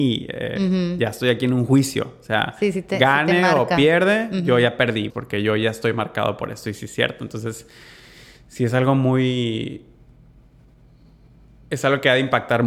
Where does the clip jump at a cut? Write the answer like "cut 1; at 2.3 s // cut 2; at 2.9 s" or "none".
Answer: cut 1; at 5.1 s